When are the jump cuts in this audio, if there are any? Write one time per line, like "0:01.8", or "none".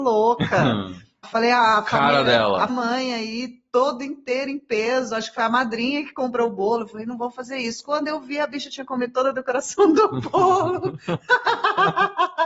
0:01.2
0:02.7